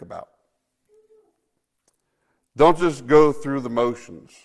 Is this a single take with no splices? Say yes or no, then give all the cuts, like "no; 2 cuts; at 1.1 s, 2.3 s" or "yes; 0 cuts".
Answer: yes; 0 cuts